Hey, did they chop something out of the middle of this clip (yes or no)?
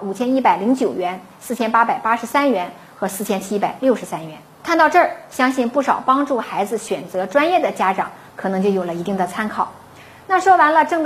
no